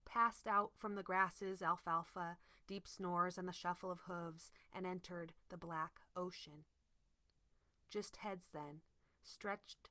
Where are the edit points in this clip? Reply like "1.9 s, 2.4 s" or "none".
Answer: none